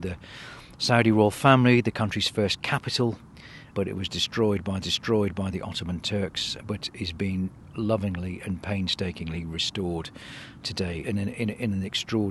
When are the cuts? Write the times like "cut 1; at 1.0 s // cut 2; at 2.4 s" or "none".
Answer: cut 1; at 3.7 s // cut 2; at 4.8 s // cut 3; at 6.6 s // cut 4; at 11.0 s